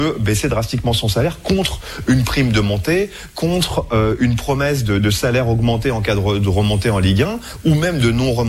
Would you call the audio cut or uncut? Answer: uncut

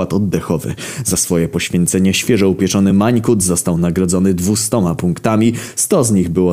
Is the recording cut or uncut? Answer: uncut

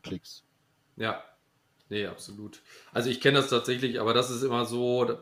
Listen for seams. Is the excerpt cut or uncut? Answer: uncut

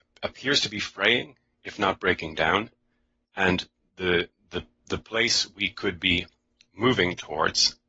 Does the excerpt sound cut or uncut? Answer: uncut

